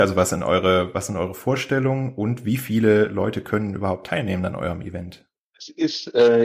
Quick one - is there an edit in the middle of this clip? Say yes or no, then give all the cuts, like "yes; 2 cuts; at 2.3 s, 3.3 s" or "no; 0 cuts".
yes; 1 cut; at 5.4 s